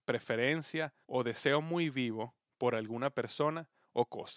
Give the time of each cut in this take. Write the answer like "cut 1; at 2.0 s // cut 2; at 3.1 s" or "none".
cut 1; at 1.0 s